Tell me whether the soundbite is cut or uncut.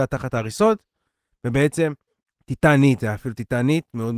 cut